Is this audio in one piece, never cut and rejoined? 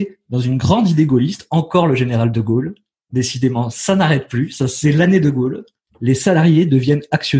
yes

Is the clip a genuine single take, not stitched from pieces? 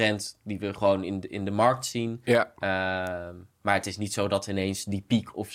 yes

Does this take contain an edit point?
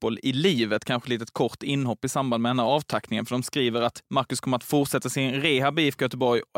no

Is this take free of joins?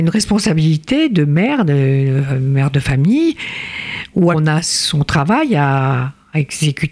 no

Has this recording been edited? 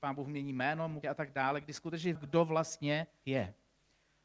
yes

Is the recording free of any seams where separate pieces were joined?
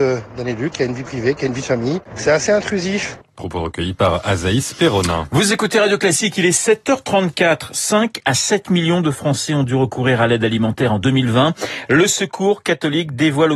yes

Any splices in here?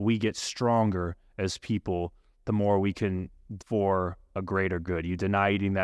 yes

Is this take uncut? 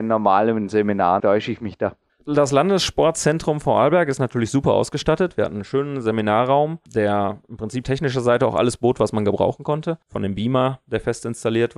no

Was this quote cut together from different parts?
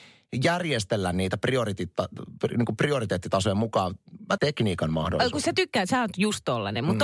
yes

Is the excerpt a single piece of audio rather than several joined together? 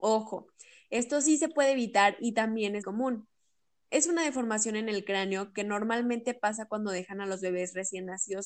no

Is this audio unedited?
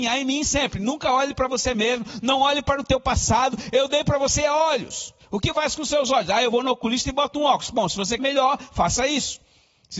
no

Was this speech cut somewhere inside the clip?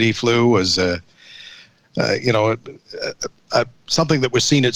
no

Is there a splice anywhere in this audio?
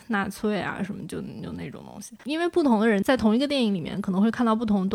yes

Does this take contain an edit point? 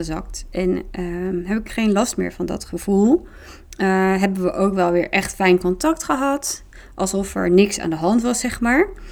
no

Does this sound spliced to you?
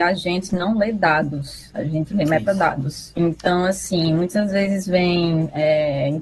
no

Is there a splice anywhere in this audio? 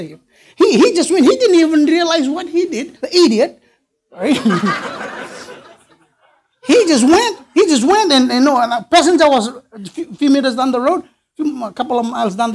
yes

